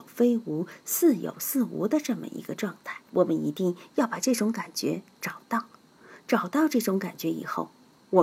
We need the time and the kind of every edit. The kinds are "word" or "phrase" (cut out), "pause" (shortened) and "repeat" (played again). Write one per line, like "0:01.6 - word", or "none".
0:03.0 - pause

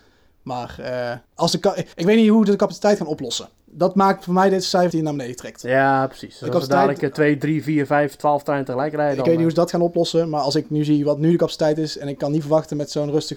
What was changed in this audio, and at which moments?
0:01.3 - pause
0:01.9 - pause
0:04.9 - word

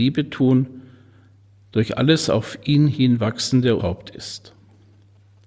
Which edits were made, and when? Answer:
0:03.8 - word

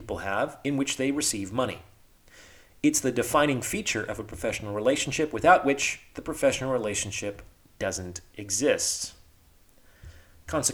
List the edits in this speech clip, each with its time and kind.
none

